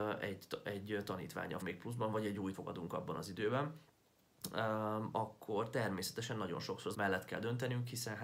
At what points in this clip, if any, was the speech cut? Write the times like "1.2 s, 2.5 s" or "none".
1.6 s, 2.5 s, 6.9 s